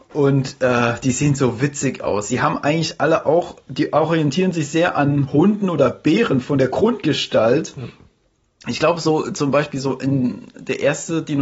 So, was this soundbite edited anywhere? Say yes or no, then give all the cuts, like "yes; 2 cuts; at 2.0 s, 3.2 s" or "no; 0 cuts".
no; 0 cuts